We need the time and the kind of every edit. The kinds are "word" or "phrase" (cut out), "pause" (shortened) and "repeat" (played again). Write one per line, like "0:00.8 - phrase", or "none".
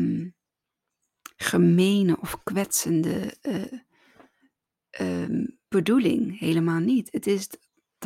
0:03.7 - word

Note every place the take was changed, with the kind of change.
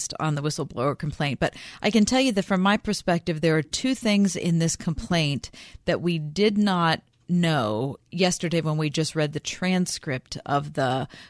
none

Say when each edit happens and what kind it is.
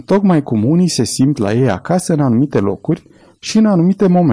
none

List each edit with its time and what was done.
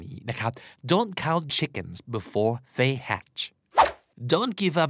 0:01.5 - word
0:02.7 - pause

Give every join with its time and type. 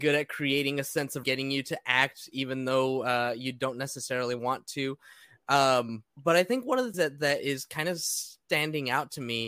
0:01.2 - phrase
0:06.1 - pause
0:06.9 - word

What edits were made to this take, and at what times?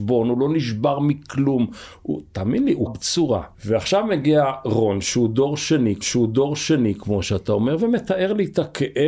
0:02.9 - word
0:03.5 - pause
0:06.0 - repeat

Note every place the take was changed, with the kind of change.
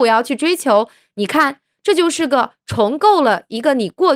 none

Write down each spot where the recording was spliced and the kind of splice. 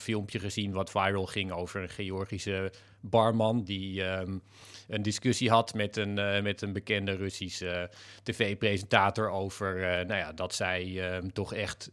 none

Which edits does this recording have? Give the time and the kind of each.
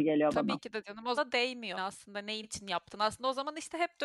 0:01.2 - word
0:01.7 - word
0:02.4 - word

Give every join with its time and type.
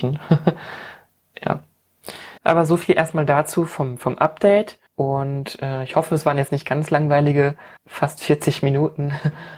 0:02.4 - pause
0:04.9 - pause
0:07.8 - pause

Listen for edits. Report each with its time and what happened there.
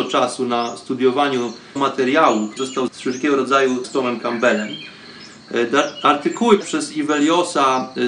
0:01.8 - word
0:02.6 - word
0:02.9 - word
0:03.8 - word
0:06.6 - word

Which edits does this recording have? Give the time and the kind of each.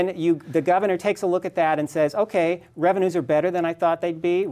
none

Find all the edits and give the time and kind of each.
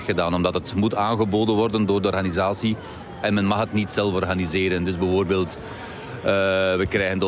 none

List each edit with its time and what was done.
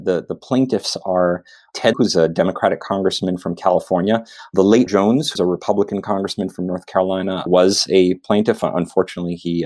0:01.9 - word
0:04.9 - word
0:05.4 - word
0:07.5 - word

